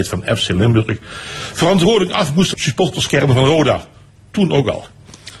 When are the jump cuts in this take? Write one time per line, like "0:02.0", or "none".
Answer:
0:02.5